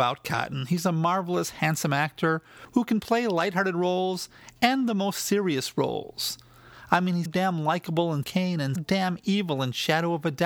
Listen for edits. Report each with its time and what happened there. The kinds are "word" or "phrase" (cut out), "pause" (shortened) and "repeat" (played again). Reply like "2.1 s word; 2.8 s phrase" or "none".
7.3 s word; 8.2 s word; 8.8 s word